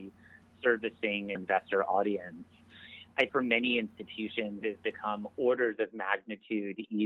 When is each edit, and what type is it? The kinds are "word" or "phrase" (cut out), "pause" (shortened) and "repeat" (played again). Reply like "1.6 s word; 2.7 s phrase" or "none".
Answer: 1.4 s word; 3.3 s word; 4.6 s phrase